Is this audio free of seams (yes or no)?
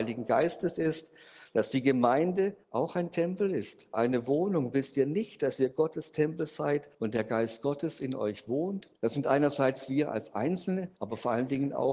no